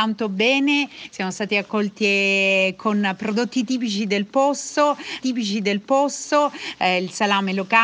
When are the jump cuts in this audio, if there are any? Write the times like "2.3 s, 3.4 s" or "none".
5.2 s

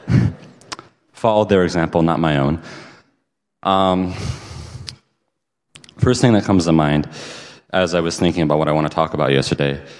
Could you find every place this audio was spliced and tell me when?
none

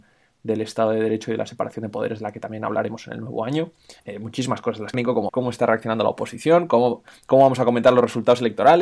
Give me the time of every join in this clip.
4.0 s, 4.9 s, 5.3 s

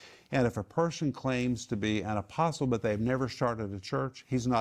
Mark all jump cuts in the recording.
none

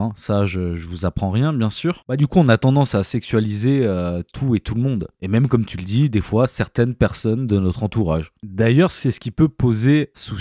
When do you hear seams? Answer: none

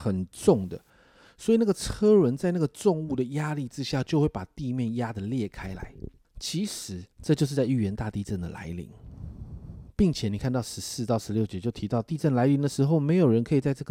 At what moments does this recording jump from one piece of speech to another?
6.2 s, 7.1 s

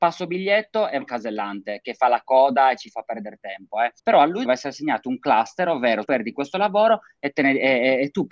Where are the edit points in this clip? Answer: 1.0 s, 4.0 s, 4.4 s, 6.1 s

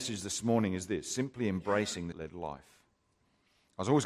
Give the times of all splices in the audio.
2.1 s

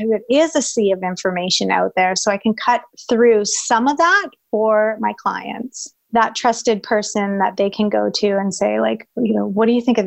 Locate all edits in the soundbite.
6.0 s

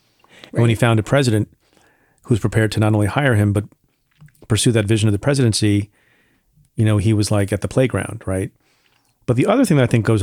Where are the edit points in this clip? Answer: none

